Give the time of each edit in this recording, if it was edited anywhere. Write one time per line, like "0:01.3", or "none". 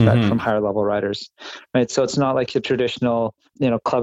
none